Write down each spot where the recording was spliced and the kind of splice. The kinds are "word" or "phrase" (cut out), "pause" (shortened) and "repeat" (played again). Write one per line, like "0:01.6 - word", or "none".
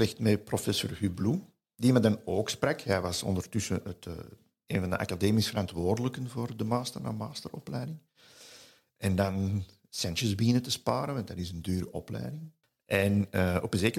none